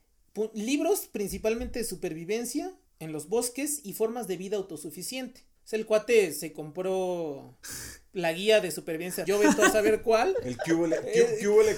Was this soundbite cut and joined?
yes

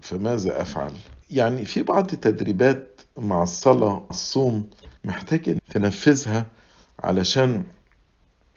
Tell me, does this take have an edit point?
yes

